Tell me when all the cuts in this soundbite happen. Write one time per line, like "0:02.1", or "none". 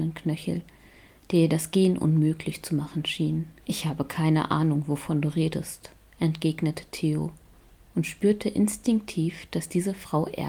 0:03.6

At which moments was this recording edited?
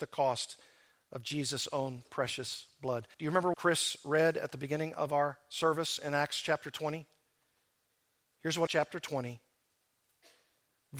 0:03.1
0:03.5
0:08.7

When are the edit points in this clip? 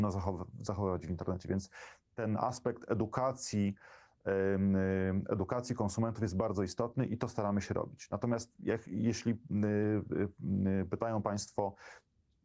none

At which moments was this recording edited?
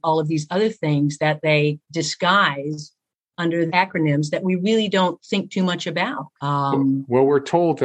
0:01.8
0:03.7
0:06.3

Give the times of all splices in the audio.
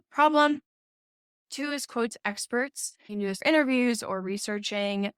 0:03.1
0:03.4

